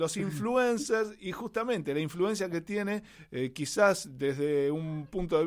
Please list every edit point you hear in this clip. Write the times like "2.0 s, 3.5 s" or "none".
none